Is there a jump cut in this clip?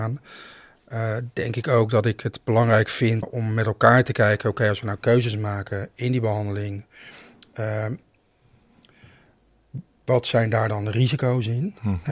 yes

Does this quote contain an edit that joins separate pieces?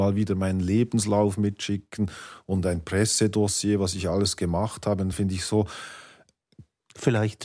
no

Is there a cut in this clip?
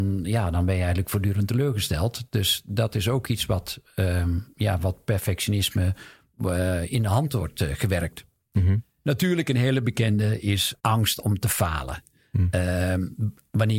yes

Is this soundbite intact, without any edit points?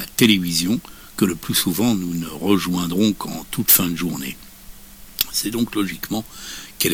yes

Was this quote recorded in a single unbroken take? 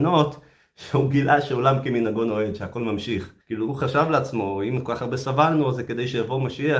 no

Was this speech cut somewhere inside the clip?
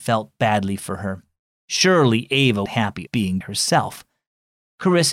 yes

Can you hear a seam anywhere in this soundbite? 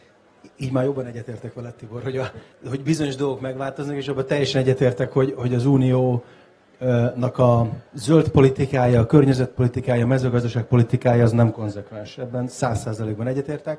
yes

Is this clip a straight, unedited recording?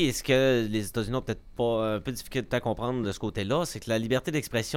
yes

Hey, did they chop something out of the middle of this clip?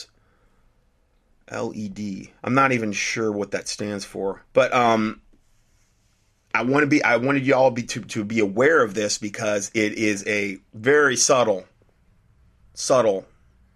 yes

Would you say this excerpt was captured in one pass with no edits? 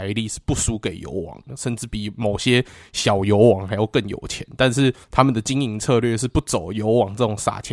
no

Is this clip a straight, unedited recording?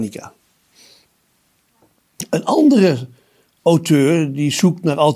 yes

